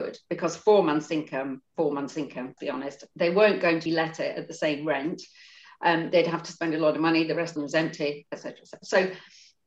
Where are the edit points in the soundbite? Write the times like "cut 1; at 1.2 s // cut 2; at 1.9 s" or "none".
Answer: cut 1; at 1.7 s // cut 2; at 2.6 s // cut 3; at 3.9 s // cut 4; at 7.6 s